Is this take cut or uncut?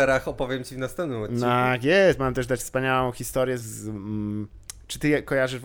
cut